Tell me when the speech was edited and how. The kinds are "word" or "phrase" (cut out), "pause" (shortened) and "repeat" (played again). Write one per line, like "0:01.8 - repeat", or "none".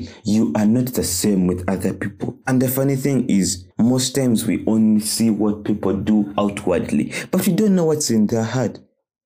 0:02.4 - pause
0:03.7 - pause